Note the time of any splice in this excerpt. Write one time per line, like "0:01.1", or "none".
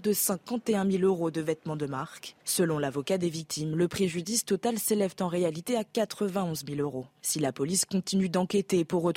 0:02.4